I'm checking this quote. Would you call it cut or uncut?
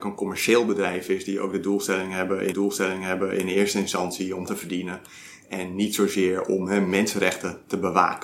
cut